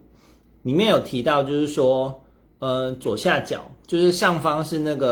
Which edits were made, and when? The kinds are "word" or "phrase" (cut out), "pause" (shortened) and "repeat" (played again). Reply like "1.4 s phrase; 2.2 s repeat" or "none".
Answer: none